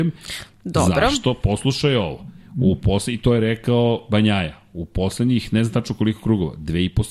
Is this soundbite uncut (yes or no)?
yes